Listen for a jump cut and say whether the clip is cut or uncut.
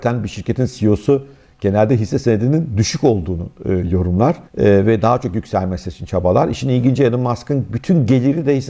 cut